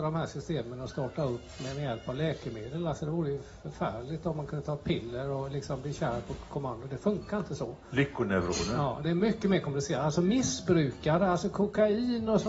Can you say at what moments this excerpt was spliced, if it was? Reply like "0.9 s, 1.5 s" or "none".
none